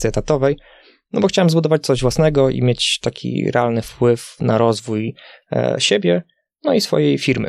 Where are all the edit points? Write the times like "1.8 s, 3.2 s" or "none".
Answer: none